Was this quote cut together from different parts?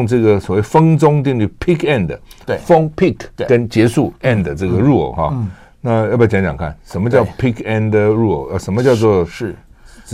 yes; 1 cut; at 3.4 s

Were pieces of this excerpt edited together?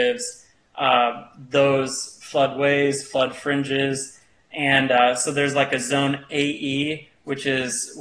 no; 0 cuts

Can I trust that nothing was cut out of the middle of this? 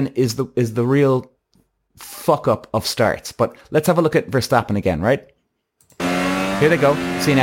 yes; 0 cuts

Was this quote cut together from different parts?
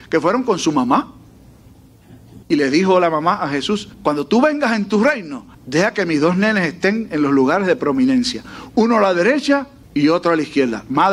yes; 4 cuts; at 2.4 s, 3.9 s, 5.5 s, 9.8 s

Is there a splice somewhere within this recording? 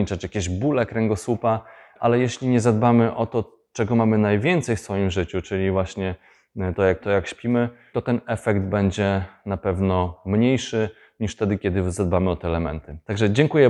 yes; 1 cut; at 7.0 s

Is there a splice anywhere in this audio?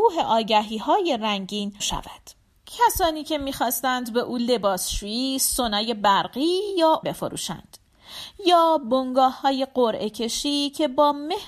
yes; 3 cuts; at 1.8 s, 2.5 s, 7.0 s

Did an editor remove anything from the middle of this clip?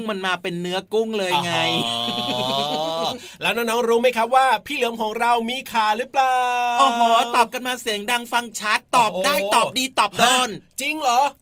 yes; 1 cut; at 8.9 s

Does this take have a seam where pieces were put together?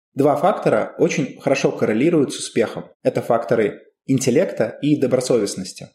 yes; 1 cut; at 2.9 s

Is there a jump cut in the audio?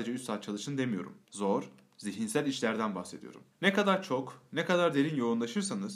yes; 2 cuts; at 1.2 s, 3.5 s

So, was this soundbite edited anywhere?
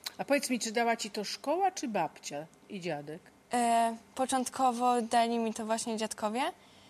no; 0 cuts

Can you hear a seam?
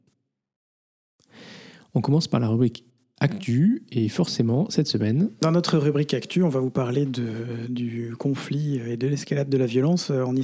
no; 0 cuts

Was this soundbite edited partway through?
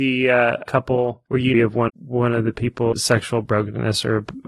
yes; 3 cuts; at 1.5 s, 1.9 s, 2.9 s

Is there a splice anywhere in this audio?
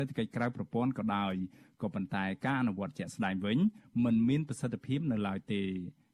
no; 0 cuts

